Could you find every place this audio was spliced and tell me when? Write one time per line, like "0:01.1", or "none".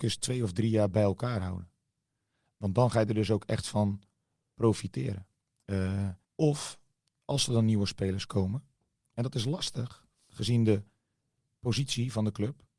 0:06.2
0:08.3